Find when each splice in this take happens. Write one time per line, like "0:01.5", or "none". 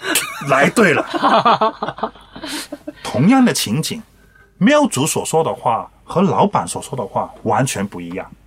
none